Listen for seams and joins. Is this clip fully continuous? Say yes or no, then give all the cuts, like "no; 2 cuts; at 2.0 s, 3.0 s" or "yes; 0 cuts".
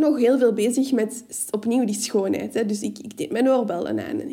yes; 0 cuts